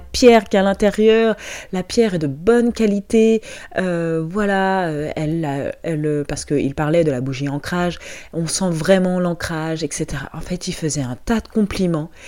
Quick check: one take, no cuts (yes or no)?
yes